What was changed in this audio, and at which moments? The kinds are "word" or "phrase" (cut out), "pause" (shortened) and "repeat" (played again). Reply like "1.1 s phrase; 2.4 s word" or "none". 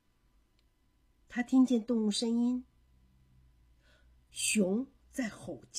none

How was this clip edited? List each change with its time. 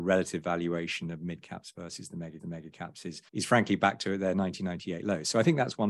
2.4 s repeat; 3.3 s pause

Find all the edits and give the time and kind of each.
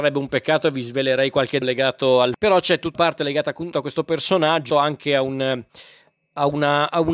1.6 s word; 2.3 s word; 2.9 s word; 3.7 s word; 4.7 s word

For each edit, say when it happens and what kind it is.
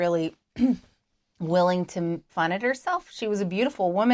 2.3 s word

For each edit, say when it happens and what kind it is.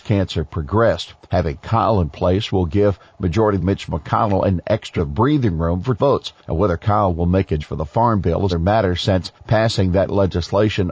1.2 s pause; 3.6 s word; 5.0 s word; 6.0 s word; 6.4 s pause; 7.6 s word; 8.5 s word; 9.4 s pause

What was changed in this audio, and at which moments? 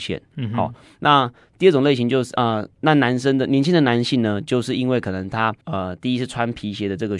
2.7 s pause; 5.6 s pause

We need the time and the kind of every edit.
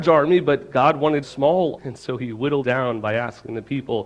1.2 s word; 1.8 s word; 2.6 s word

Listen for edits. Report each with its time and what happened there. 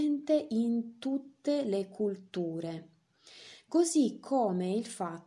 none

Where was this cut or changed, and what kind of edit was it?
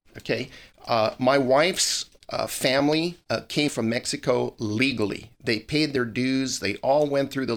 3.2 s pause; 3.7 s word

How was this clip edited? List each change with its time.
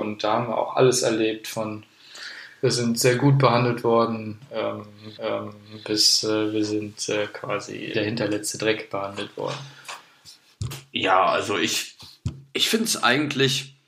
5.2 s repeat; 7.9 s phrase

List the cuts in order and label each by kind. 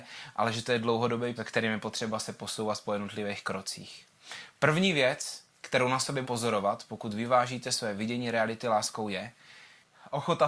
1.4 s word; 5.5 s pause; 6.2 s word

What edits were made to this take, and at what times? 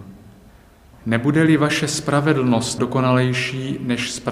2.8 s word

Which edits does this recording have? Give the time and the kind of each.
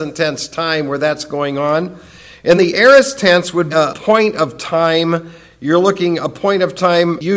2.6 s word; 3.7 s word

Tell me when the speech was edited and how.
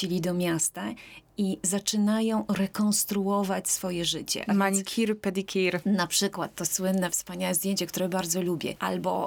none

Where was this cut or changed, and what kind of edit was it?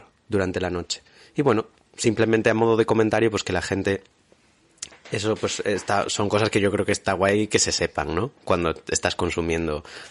none

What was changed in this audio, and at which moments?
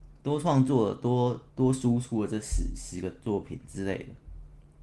1.5 s pause

